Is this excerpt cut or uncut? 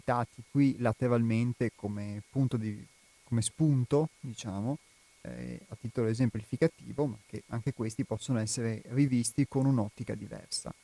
uncut